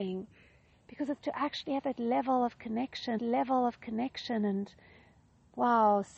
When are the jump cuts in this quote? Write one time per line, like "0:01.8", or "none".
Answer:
0:01.2
0:03.2